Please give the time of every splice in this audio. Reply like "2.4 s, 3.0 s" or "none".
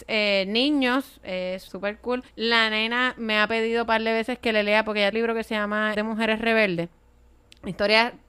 1.7 s, 2.3 s, 5.1 s, 5.9 s